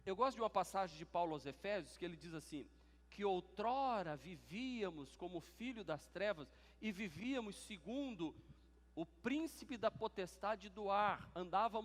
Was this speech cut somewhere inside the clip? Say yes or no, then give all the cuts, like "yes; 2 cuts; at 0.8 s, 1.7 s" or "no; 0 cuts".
no; 0 cuts